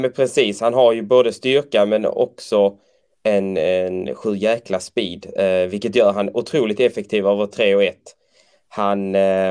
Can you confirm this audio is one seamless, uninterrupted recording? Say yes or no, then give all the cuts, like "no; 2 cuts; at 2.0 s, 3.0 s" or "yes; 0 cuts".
yes; 0 cuts